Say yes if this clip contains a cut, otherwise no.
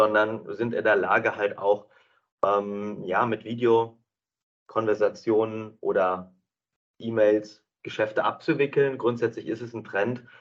yes